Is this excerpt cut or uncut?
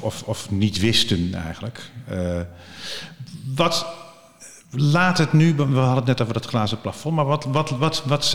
uncut